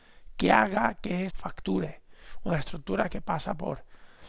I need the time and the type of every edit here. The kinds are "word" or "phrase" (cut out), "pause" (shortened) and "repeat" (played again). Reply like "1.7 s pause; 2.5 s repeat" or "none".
1.3 s word